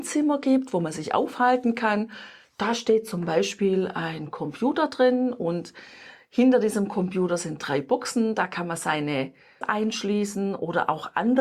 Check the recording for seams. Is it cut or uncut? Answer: cut